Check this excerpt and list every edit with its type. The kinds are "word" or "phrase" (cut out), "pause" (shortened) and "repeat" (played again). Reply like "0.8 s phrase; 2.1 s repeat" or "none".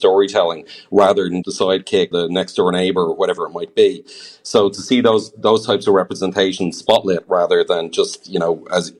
1.4 s word; 2.1 s word